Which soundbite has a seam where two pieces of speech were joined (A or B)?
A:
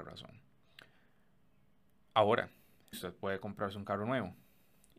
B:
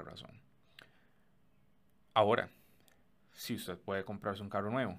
A